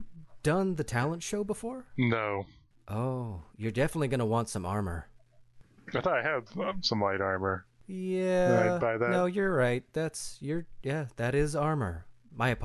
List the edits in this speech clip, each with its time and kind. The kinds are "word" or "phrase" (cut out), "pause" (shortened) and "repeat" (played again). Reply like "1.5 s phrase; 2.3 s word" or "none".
none